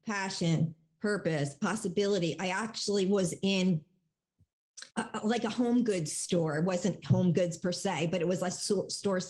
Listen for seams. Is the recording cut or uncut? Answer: cut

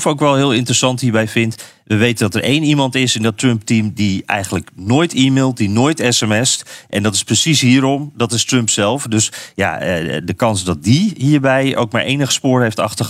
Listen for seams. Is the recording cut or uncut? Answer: uncut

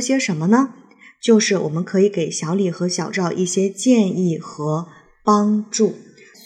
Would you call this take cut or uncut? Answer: uncut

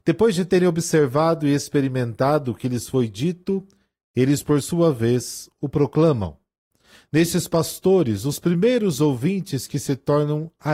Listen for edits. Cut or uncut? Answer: uncut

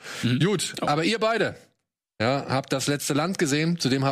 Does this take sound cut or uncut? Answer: uncut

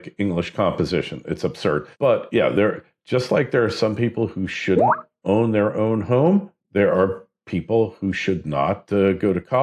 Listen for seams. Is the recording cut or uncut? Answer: cut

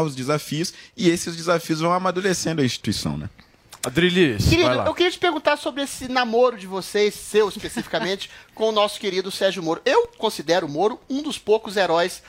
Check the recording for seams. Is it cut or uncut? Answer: uncut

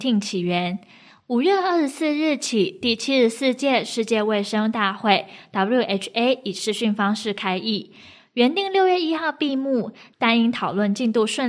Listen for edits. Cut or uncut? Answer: uncut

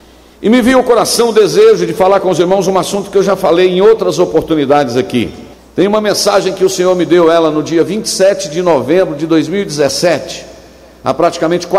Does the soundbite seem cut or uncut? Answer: cut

